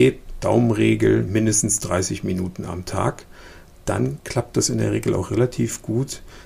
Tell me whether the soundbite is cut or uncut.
uncut